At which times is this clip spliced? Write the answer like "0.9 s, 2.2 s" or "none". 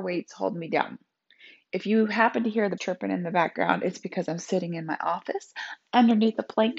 2.8 s